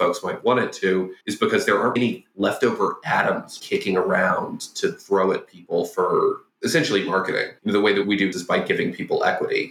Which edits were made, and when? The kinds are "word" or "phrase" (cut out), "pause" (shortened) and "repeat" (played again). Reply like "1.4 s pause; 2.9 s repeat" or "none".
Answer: 1.2 s pause; 2.0 s word; 3.6 s word; 7.6 s pause; 8.3 s phrase